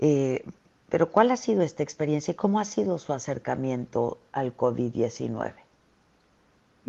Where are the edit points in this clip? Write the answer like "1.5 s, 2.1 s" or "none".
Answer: none